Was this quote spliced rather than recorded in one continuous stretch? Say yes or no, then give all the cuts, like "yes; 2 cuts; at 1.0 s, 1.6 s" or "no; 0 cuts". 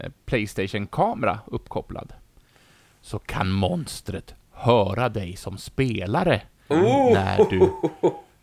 no; 0 cuts